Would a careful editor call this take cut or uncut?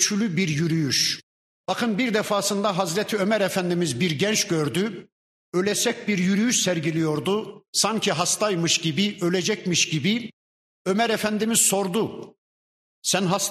cut